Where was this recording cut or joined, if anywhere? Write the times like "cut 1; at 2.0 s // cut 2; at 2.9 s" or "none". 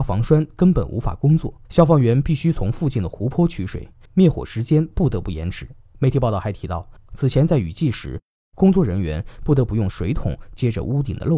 cut 1; at 1.7 s